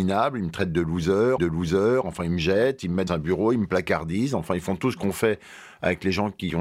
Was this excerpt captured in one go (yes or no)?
no